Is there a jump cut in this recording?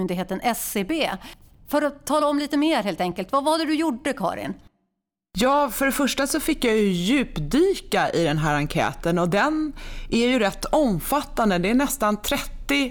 no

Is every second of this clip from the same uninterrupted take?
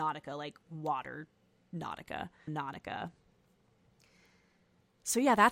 no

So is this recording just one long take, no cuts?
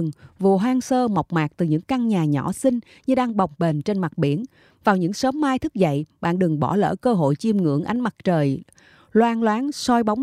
yes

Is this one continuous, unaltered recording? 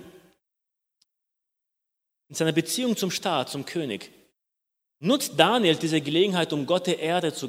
yes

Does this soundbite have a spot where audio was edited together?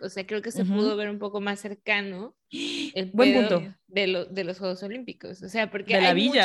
no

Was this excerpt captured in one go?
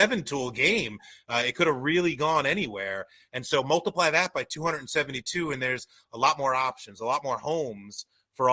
yes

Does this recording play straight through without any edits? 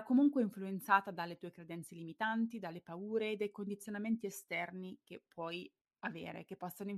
yes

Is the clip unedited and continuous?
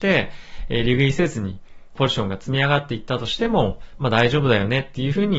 no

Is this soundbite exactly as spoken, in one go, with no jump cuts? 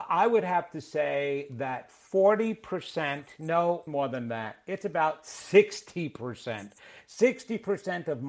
no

